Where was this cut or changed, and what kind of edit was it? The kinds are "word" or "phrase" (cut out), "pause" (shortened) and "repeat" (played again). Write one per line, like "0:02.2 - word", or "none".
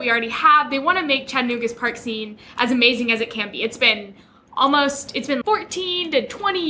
0:05.4 - word